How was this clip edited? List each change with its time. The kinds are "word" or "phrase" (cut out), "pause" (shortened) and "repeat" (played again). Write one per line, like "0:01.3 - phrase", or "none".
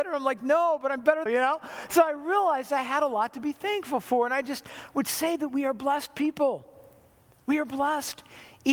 0:01.3 - phrase